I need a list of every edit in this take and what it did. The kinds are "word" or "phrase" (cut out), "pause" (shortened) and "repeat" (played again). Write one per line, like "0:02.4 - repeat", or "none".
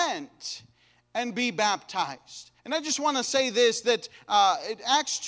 0:02.6 - pause